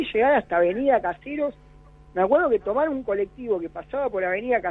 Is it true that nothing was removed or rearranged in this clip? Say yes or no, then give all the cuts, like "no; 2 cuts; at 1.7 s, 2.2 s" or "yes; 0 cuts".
yes; 0 cuts